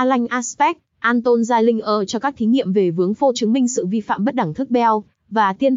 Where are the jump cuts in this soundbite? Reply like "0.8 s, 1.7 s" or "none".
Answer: 3.3 s